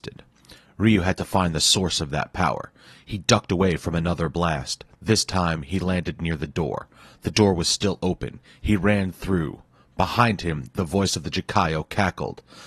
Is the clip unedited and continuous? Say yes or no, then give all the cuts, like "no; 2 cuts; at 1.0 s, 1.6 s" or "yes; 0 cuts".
yes; 0 cuts